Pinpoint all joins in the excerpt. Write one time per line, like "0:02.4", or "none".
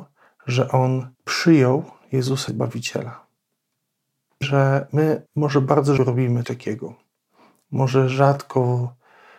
0:01.1
0:02.5
0:04.4
0:05.3
0:06.0
0:06.4